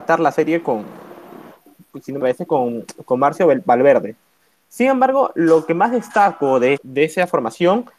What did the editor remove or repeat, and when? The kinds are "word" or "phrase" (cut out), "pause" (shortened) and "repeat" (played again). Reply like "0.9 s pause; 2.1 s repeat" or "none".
2.2 s word; 6.7 s word